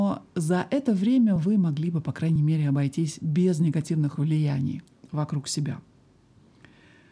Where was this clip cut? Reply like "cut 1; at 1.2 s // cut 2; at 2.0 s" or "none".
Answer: none